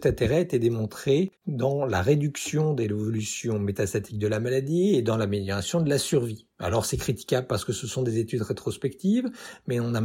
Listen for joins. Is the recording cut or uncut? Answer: cut